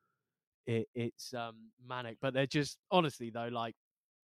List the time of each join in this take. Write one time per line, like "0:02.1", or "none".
0:01.8